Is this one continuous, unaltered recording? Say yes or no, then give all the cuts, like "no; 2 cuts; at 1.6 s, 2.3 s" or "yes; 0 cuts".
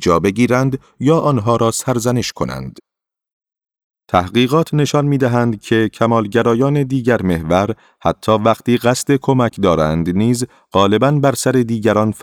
yes; 0 cuts